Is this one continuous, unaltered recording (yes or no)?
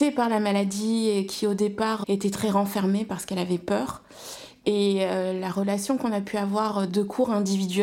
no